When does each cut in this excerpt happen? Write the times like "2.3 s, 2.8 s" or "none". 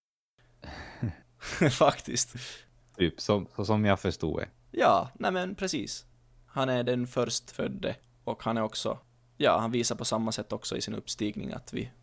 none